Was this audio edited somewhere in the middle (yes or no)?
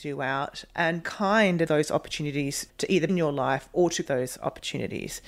yes